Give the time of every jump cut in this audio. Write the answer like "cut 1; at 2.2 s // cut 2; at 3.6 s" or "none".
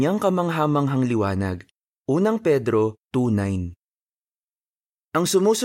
cut 1; at 1.8 s // cut 2; at 3.0 s